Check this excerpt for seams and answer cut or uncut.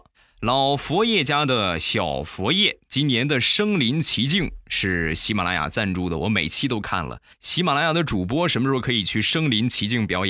cut